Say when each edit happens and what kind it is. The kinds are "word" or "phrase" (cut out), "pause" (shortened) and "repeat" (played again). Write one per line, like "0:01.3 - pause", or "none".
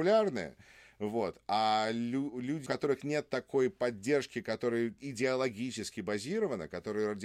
0:02.7 - word
0:05.0 - word